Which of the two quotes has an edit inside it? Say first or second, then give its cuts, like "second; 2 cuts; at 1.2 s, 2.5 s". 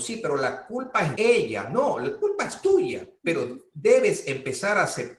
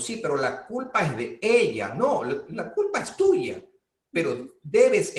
first; 3 cuts; at 1.2 s, 2.2 s, 3.2 s